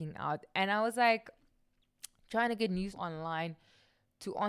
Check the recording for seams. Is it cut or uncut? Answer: cut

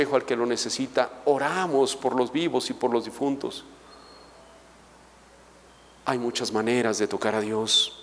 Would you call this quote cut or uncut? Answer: uncut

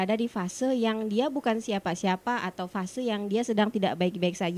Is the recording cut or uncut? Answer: uncut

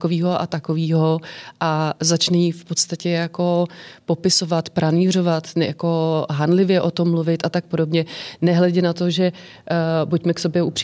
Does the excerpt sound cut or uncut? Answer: uncut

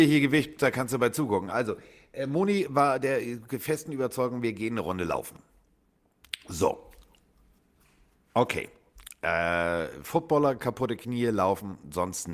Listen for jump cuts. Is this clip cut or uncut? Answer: uncut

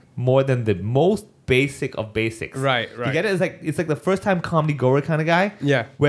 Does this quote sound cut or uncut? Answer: uncut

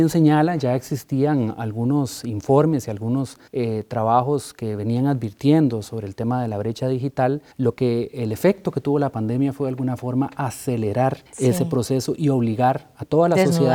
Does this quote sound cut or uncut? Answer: cut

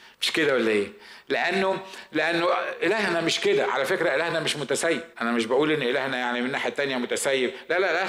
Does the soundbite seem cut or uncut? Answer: cut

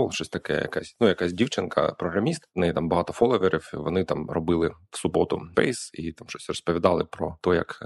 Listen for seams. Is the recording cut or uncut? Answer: cut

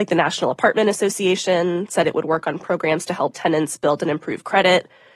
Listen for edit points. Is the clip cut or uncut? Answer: uncut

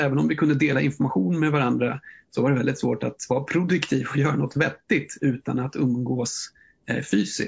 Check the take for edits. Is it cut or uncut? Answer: uncut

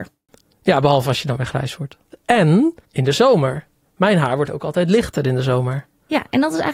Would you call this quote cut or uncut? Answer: cut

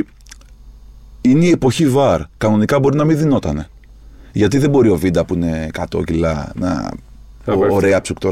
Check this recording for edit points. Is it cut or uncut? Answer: uncut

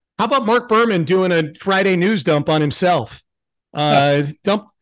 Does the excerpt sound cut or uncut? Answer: uncut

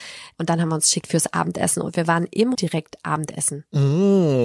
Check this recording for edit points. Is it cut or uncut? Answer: cut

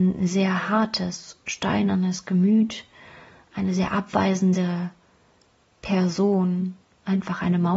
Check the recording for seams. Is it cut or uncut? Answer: uncut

